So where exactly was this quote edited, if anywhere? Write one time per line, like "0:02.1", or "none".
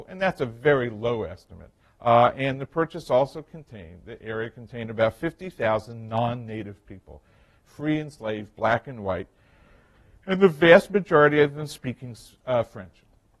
0:01.8